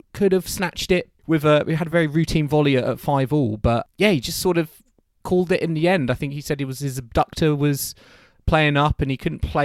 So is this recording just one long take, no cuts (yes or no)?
yes